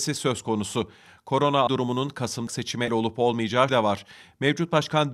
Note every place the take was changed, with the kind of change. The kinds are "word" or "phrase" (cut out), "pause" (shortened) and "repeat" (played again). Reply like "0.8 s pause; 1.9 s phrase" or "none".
1.7 s word; 2.5 s word; 2.9 s word; 3.7 s word